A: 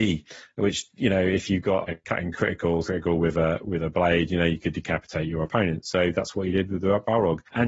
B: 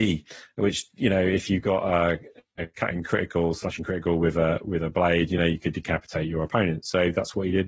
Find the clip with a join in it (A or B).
A